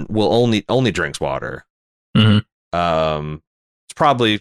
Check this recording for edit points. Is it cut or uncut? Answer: uncut